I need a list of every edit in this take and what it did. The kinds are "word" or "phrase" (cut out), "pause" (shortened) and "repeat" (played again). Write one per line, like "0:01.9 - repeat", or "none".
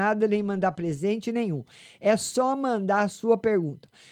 none